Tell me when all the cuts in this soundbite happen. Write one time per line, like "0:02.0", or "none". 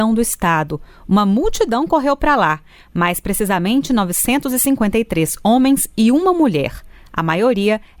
none